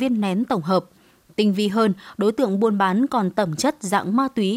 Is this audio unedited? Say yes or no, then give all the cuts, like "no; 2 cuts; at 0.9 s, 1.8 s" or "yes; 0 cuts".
yes; 0 cuts